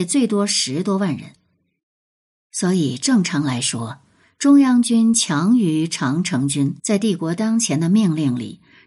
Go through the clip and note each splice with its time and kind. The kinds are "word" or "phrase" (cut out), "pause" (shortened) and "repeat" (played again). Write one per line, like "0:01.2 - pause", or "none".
0:06.8 - pause

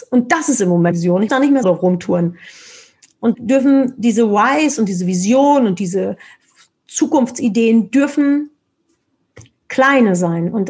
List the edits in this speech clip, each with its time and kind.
0:00.9 - word
0:01.3 - word
0:01.6 - word
0:03.3 - word

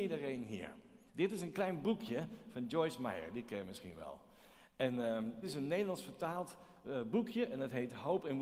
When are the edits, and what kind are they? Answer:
0:01.1 - pause
0:05.4 - word

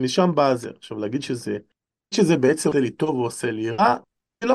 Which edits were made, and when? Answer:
none

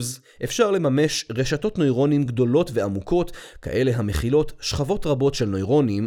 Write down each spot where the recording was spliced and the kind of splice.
none

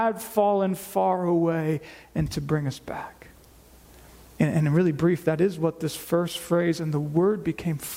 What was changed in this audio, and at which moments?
none

